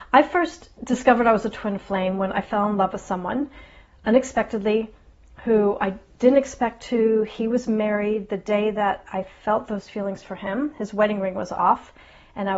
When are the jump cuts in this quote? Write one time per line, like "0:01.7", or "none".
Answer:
none